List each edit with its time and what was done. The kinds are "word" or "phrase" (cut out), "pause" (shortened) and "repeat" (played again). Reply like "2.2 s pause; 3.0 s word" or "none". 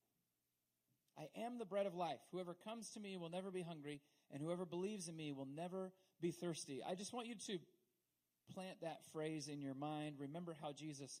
none